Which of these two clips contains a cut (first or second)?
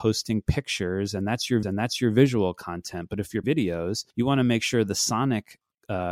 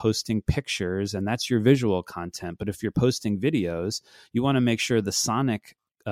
first